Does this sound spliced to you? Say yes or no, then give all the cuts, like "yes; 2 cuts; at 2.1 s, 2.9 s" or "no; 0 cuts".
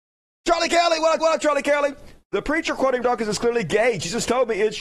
yes; 2 cuts; at 1.2 s, 3.0 s